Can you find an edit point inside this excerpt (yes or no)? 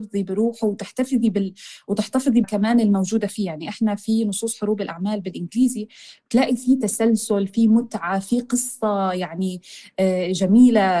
yes